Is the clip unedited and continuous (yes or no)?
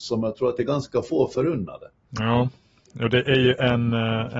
yes